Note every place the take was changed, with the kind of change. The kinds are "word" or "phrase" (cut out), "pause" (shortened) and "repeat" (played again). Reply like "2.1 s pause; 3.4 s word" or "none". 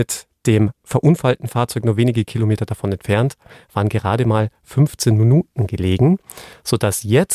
none